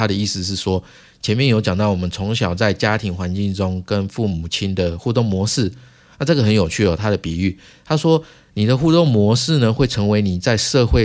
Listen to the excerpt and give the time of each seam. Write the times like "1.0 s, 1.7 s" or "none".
none